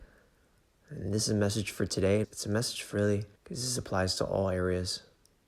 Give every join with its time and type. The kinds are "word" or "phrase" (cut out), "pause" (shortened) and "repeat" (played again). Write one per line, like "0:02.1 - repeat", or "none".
0:02.2 - word
0:02.9 - word
0:03.3 - pause

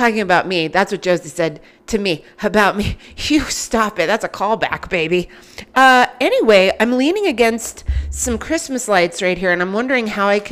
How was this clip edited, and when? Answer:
none

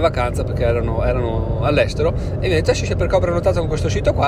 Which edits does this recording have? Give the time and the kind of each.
none

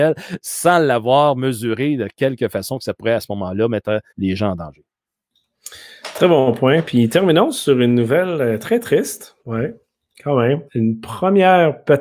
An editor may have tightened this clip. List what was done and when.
0:04.1 - pause
0:09.4 - pause
0:10.7 - pause

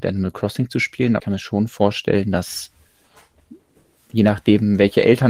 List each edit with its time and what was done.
0:01.2 - word
0:04.1 - word

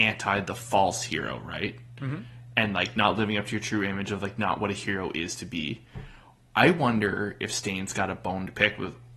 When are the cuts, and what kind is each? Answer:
none

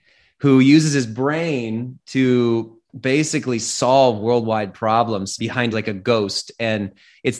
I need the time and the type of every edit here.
0:05.4 - word
0:05.7 - phrase

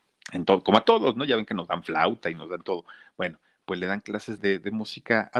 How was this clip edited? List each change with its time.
0:04.4 - word

